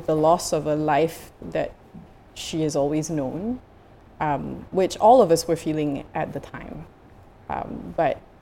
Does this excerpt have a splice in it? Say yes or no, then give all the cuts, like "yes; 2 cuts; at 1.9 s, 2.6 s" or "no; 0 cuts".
no; 0 cuts